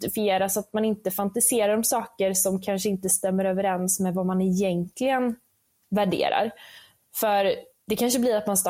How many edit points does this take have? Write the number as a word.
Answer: zero